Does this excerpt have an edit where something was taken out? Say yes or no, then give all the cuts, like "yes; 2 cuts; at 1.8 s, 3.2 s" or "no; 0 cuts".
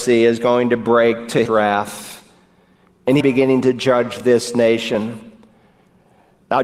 yes; 2 cuts; at 1.5 s, 3.2 s